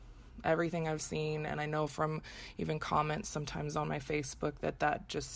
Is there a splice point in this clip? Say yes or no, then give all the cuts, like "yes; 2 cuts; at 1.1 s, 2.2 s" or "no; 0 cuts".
no; 0 cuts